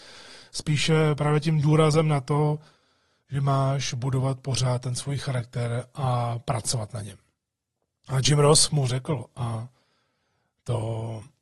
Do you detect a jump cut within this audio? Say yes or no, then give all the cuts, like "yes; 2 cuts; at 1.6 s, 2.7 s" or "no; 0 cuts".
no; 0 cuts